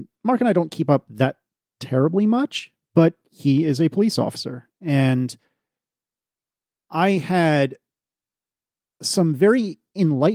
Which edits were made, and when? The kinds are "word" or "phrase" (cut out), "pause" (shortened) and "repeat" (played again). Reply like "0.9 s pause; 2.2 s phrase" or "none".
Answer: none